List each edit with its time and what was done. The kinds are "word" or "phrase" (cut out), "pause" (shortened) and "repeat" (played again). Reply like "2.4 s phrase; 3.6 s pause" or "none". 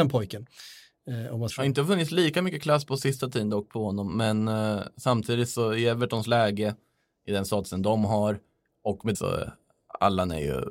1.5 s word; 9.1 s phrase